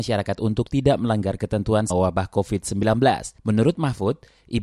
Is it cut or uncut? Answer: cut